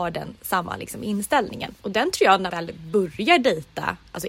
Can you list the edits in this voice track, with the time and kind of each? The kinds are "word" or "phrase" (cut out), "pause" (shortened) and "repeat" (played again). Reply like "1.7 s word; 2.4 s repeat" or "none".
1.8 s pause; 2.5 s phrase